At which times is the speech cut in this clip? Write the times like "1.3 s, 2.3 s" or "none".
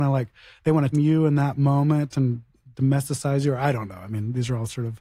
0.9 s